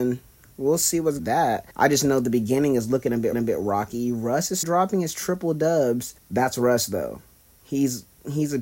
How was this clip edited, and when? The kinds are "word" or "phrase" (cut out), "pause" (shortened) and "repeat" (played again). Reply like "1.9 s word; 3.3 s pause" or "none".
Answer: 1.2 s phrase; 1.7 s pause; 3.3 s repeat; 4.6 s word; 6.2 s pause